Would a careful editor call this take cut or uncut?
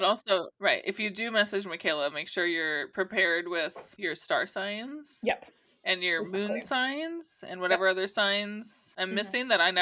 uncut